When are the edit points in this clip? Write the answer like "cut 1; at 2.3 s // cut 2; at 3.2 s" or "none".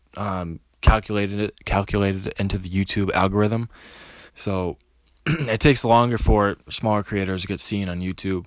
cut 1; at 4.3 s // cut 2; at 6.7 s